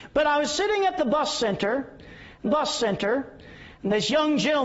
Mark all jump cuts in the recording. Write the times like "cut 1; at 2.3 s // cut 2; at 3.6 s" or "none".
cut 1; at 2.4 s